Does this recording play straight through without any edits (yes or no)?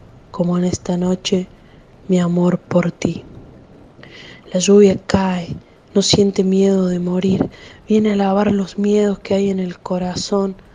yes